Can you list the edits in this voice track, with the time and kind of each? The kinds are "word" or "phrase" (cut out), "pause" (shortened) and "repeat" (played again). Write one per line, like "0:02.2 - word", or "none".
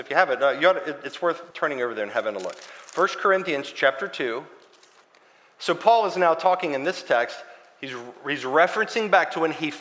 0:01.5 - pause
0:05.0 - pause